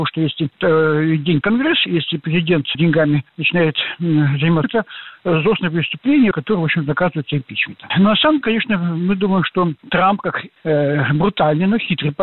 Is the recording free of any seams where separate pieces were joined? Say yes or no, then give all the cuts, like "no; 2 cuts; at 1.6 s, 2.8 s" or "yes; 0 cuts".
no; 6 cuts; at 1.4 s, 2.7 s, 4.6 s, 6.3 s, 8.4 s, 10.5 s